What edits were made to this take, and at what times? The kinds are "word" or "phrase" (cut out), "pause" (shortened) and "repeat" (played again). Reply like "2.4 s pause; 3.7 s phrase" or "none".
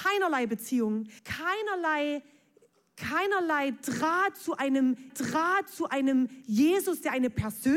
1.2 s pause; 5.1 s repeat